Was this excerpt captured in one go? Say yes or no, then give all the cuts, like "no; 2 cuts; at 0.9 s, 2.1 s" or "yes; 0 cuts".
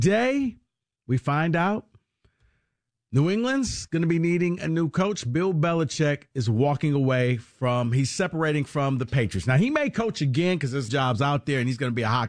no; 1 cut; at 10.9 s